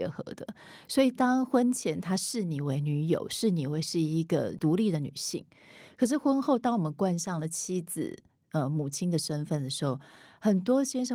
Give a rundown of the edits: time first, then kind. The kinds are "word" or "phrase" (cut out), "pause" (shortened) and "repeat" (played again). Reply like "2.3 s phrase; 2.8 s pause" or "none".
none